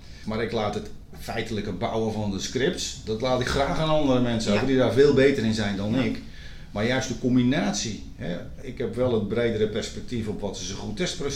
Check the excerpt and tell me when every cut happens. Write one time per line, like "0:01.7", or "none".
none